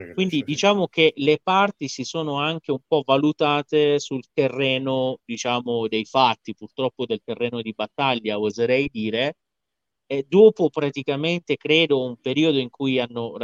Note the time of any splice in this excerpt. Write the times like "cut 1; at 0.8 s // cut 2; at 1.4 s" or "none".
none